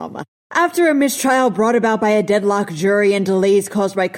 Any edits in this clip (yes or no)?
no